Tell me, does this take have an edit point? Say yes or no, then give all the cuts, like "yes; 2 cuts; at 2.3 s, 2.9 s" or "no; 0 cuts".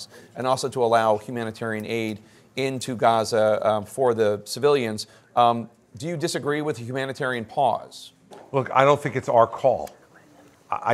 no; 0 cuts